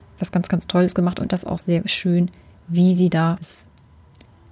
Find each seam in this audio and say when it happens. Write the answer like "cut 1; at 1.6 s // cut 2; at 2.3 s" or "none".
cut 1; at 1.3 s // cut 2; at 3.4 s